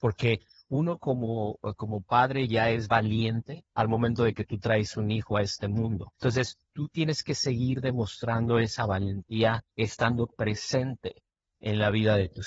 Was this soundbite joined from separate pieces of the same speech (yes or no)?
yes